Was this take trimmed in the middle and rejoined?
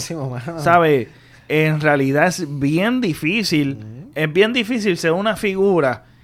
no; 0 cuts

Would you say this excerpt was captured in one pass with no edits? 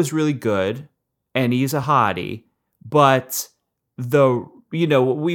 yes; 0 cuts

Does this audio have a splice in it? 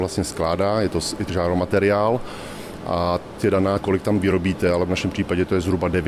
yes; 3 cuts; at 1.3 s, 3.4 s, 3.8 s

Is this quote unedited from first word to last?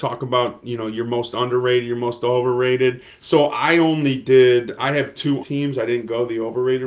no; 1 cut; at 5.4 s

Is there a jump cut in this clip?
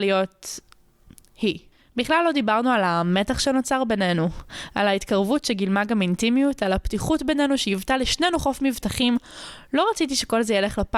yes; 1 cut; at 1.7 s

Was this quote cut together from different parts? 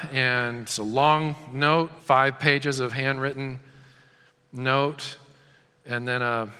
yes; 1 cut; at 2.0 s

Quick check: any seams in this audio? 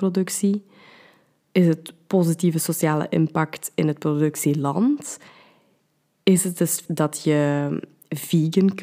yes; 1 cut; at 6.9 s

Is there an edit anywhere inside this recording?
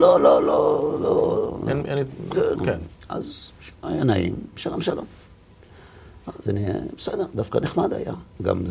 yes; 2 cuts; at 2.5 s, 3.8 s

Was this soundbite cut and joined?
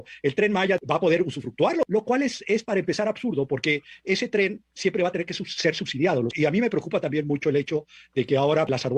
no; 0 cuts

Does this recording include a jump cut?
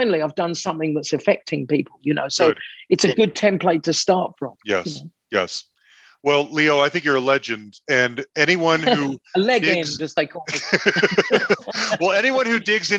no; 0 cuts

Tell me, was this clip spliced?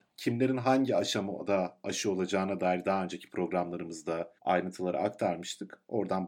yes; 1 cut; at 4.4 s

